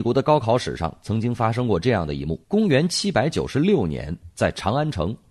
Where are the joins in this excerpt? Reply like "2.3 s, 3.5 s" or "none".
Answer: 2.4 s